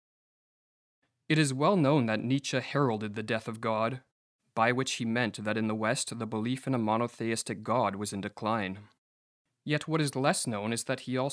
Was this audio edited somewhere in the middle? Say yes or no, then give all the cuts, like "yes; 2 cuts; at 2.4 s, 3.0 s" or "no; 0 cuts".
no; 0 cuts